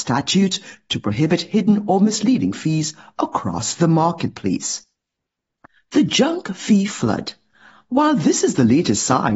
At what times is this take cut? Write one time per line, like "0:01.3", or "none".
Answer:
none